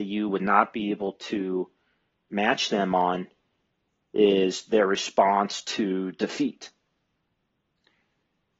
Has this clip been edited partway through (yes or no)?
no